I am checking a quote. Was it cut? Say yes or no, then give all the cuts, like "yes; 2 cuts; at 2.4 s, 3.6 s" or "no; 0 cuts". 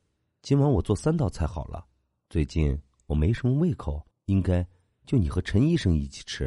yes; 1 cut; at 4.1 s